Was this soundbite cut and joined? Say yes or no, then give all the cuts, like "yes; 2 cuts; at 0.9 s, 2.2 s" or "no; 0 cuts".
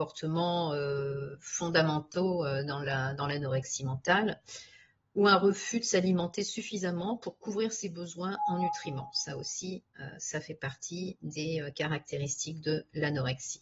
no; 0 cuts